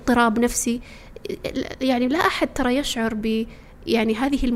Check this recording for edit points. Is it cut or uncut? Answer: uncut